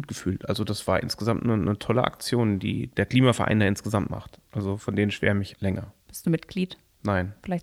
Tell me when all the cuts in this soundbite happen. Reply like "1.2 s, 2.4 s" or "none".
5.5 s, 6.0 s